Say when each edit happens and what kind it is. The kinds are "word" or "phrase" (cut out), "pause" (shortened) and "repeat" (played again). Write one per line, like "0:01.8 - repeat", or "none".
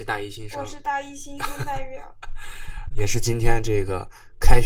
0:02.9 - word